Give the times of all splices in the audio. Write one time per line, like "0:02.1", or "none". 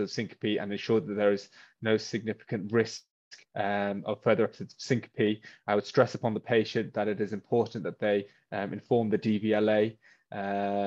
none